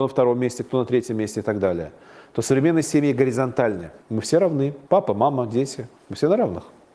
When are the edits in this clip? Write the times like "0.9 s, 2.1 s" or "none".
4.0 s, 4.9 s, 6.0 s